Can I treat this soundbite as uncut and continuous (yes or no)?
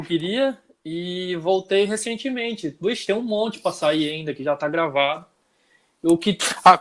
yes